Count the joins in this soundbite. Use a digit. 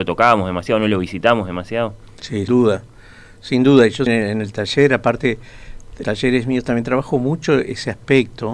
3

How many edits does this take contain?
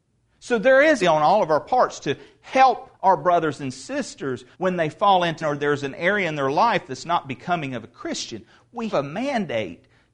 5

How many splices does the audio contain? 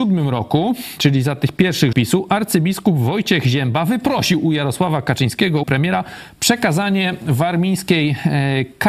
2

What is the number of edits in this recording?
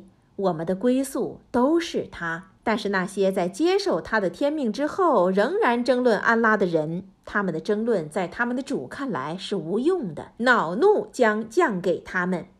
2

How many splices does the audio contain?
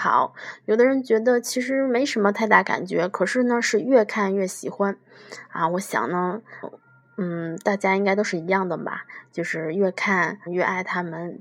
2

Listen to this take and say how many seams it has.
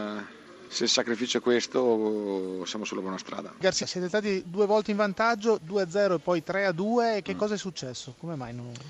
1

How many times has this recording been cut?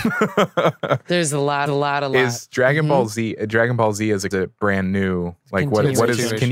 2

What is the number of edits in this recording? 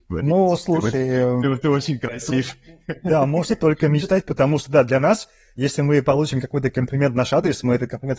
0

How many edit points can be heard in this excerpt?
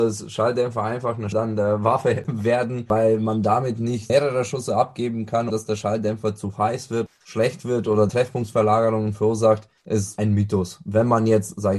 5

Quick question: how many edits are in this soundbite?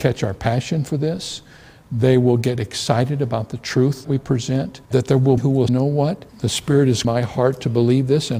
6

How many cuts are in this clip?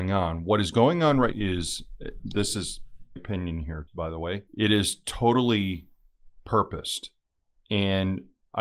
5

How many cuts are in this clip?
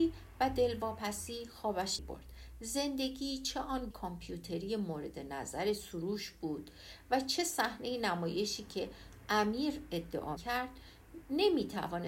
3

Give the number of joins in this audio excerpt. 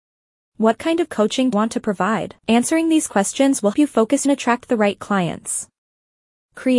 4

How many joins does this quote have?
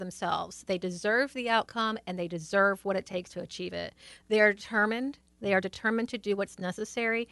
0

